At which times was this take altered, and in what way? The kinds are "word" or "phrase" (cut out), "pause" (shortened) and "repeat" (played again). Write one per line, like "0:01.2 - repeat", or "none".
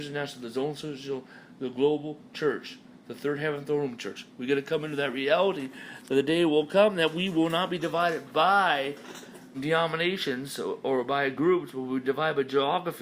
0:09.5 - word